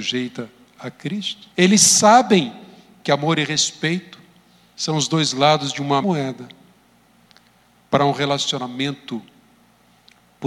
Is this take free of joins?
no; 2 cuts; at 1.5 s, 6.0 s

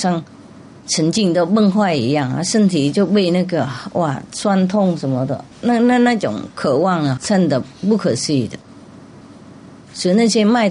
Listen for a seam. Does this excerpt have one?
yes; 2 cuts; at 5.5 s, 7.2 s

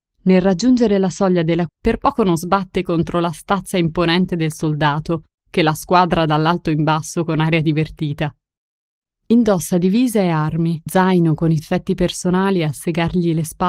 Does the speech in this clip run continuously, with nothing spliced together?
no; 3 cuts; at 1.7 s, 10.9 s, 11.6 s

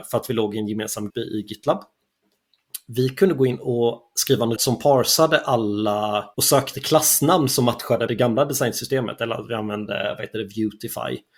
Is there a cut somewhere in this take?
yes; 5 cuts; at 1.1 s, 4.6 s, 6.3 s, 6.7 s, 8.1 s

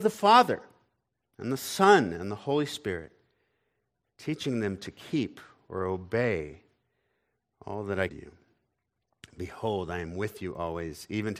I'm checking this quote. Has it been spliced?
yes; 1 cut; at 8.1 s

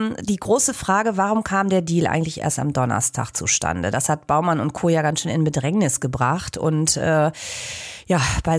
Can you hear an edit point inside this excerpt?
no; 0 cuts

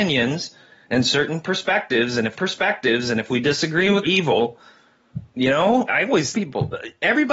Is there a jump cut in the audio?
yes; 4 cuts; at 2.3 s, 4.0 s, 5.9 s, 6.3 s

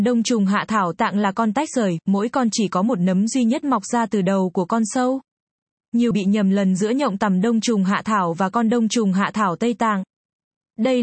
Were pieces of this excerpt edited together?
yes; 2 cuts; at 0.9 s, 6.1 s

